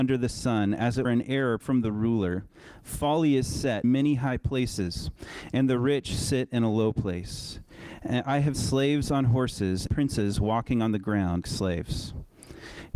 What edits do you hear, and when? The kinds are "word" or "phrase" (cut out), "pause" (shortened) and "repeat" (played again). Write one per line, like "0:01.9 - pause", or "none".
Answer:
0:01.0 - word
0:01.6 - word
0:03.8 - word
0:08.5 - word
0:09.9 - word
0:11.4 - word